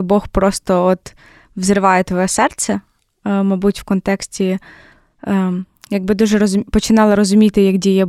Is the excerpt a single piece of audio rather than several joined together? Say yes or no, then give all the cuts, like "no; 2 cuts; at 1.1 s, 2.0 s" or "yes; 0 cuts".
yes; 0 cuts